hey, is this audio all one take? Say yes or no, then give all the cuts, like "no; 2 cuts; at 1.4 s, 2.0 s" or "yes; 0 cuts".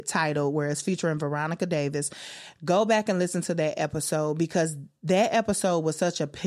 yes; 0 cuts